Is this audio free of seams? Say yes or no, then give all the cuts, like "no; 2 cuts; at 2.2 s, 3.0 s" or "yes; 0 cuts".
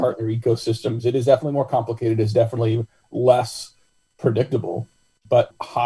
yes; 0 cuts